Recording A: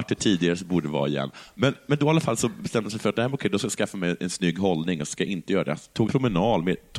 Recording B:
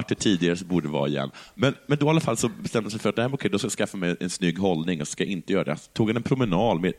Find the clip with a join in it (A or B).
A